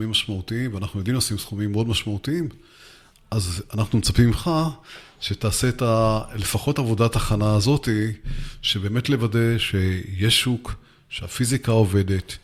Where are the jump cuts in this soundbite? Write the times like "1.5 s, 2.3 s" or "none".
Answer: none